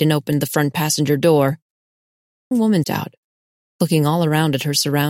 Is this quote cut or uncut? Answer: cut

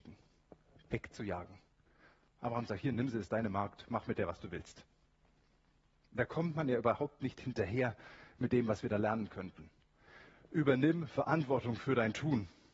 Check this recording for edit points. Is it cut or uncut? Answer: uncut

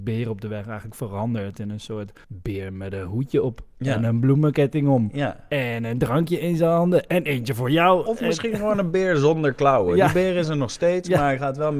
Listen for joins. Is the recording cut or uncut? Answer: cut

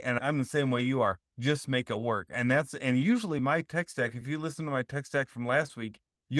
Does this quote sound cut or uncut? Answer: uncut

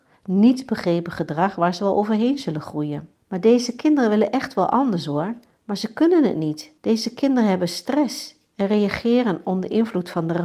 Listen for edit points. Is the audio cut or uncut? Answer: cut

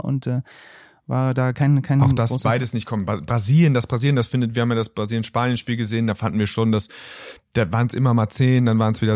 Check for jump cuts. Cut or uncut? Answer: uncut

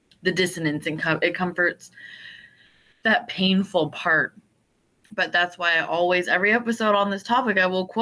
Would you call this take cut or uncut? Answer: uncut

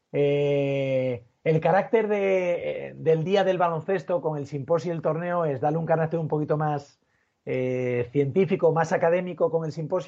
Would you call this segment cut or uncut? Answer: uncut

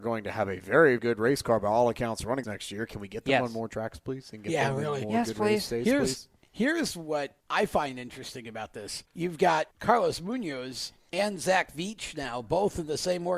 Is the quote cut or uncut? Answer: cut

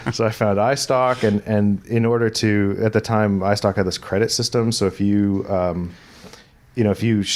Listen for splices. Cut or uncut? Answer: uncut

